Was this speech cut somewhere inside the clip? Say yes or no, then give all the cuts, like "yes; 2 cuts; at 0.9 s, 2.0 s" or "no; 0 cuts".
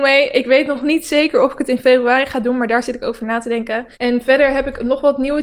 yes; 1 cut; at 3.9 s